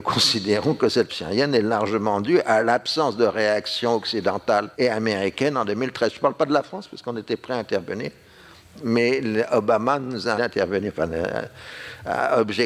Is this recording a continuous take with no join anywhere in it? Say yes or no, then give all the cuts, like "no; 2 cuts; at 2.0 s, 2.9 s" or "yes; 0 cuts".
no; 3 cuts; at 1.1 s, 4.7 s, 10.4 s